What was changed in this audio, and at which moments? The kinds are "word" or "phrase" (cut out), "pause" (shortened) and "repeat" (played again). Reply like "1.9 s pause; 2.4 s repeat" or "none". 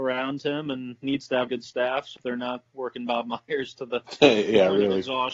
1.5 s word; 2.2 s phrase; 2.7 s word